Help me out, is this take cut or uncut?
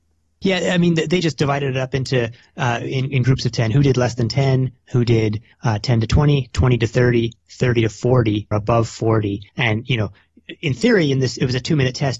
cut